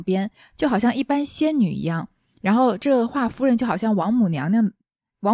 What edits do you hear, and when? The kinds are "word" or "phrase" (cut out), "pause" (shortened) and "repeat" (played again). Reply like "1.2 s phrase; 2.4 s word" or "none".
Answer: none